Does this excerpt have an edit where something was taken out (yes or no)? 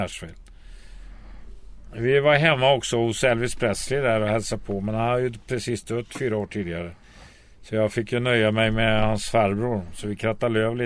no